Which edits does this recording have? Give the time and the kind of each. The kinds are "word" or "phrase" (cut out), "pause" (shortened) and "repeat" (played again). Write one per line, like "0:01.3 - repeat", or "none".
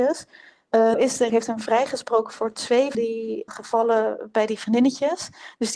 0:00.9 - word
0:01.3 - word
0:02.9 - word
0:03.5 - word